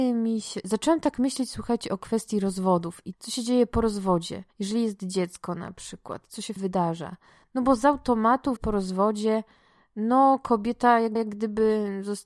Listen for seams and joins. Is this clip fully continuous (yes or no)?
no